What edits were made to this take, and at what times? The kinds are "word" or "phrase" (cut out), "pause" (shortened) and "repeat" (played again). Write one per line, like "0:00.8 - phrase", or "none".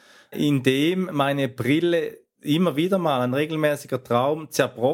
none

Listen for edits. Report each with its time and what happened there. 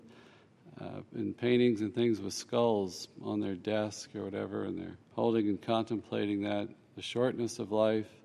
0:05.0 - pause

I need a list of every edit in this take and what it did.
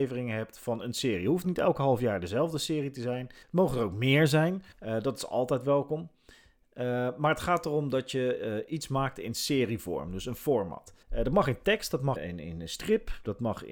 0:01.4 - word
0:03.4 - pause
0:04.7 - pause
0:11.0 - pause
0:12.2 - word

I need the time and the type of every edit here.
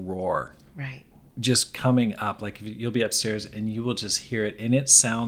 none

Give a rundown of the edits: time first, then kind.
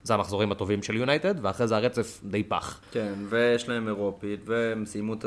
0:02.8 - pause

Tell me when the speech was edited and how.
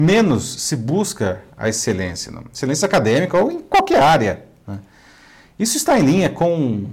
none

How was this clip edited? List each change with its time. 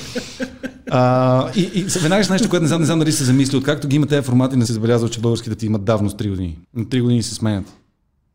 0:01.5 - word
0:02.3 - word
0:02.8 - repeat
0:04.6 - phrase
0:05.6 - phrase
0:06.6 - pause

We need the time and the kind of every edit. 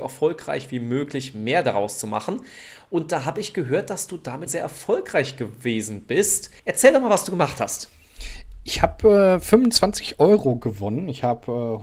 0:04.5 - word
0:06.6 - pause

